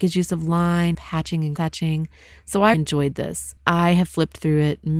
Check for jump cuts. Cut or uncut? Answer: cut